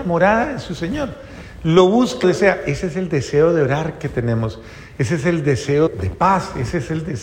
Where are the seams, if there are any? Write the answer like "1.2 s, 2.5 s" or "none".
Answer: 2.2 s, 5.9 s